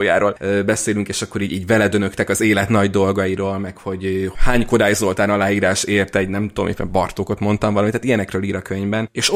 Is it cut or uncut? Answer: uncut